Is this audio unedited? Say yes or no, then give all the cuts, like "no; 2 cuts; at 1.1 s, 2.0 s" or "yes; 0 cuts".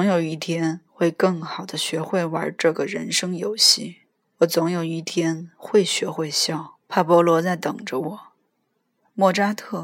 no; 2 cuts; at 4.2 s, 6.8 s